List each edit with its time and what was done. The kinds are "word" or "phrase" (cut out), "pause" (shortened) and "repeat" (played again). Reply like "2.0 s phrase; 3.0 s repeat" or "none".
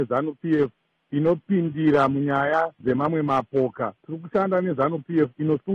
2.7 s pause; 4.0 s pause